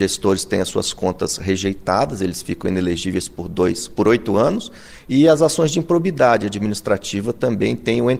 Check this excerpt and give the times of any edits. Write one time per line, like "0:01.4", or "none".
none